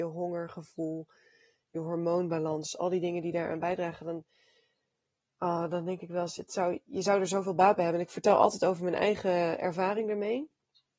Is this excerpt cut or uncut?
uncut